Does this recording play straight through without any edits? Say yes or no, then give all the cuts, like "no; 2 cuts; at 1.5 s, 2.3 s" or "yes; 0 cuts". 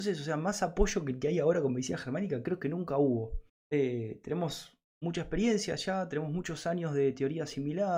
no; 2 cuts; at 3.5 s, 4.9 s